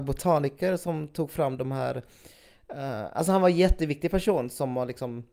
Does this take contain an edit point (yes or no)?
no